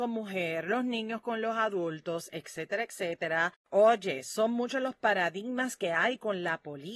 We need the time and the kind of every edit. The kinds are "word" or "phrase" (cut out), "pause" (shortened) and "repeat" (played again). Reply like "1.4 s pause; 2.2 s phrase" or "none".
3.6 s pause